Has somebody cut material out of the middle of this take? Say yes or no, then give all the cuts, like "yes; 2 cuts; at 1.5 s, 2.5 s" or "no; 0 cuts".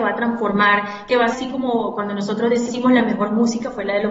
yes; 1 cut; at 1.3 s